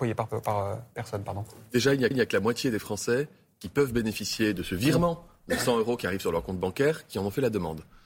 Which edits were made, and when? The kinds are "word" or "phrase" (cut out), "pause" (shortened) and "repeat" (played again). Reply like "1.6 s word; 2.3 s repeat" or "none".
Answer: 2.1 s repeat

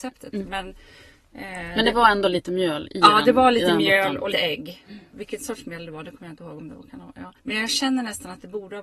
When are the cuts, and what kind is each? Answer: 4.3 s word; 7.4 s pause

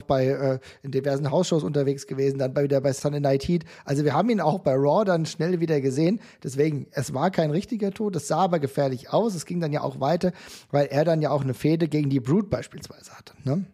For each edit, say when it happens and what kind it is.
none

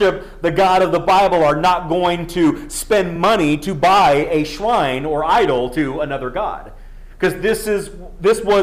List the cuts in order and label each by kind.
none

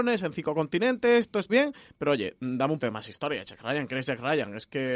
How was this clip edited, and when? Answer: 1.5 s word; 2.8 s word

